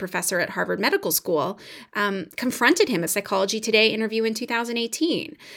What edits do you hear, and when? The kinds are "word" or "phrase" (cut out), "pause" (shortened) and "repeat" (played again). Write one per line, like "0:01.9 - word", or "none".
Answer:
0:03.1 - phrase